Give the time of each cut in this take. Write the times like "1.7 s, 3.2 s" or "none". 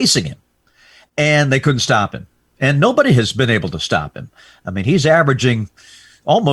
none